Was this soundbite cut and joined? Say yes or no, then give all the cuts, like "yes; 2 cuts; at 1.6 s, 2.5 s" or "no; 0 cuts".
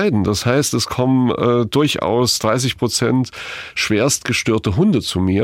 no; 0 cuts